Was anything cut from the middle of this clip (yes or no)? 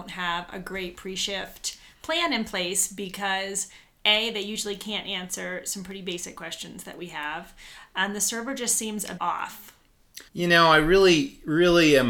yes